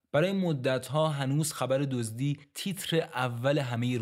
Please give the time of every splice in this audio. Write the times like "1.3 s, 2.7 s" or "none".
none